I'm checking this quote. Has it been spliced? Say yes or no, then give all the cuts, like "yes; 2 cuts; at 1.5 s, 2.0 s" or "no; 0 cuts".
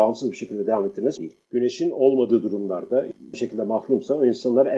yes; 2 cuts; at 1.2 s, 3.3 s